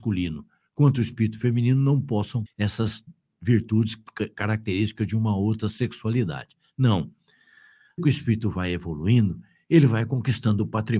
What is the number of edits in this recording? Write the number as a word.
two